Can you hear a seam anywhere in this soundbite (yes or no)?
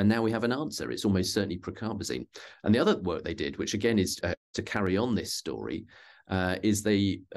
yes